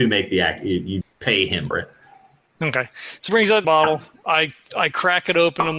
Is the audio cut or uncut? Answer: cut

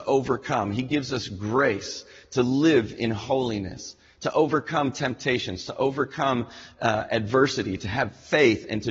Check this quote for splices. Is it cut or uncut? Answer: uncut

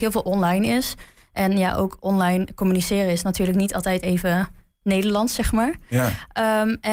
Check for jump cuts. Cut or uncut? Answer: uncut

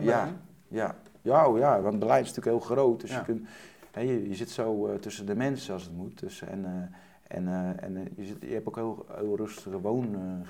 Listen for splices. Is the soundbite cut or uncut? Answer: uncut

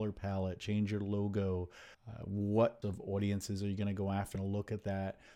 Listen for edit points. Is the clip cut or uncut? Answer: cut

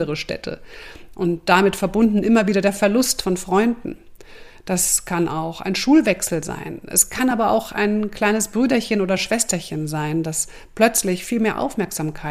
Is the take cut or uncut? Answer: uncut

